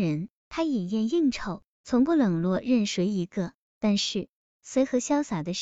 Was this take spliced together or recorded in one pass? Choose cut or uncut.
uncut